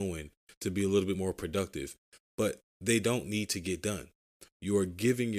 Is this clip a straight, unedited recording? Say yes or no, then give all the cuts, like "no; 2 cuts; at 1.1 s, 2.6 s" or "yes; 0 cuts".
yes; 0 cuts